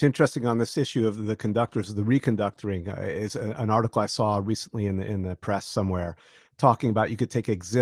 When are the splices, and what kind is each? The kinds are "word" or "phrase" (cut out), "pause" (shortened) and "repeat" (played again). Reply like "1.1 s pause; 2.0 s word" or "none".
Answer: none